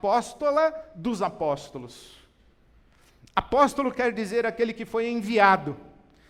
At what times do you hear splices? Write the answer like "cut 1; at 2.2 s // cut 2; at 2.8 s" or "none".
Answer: none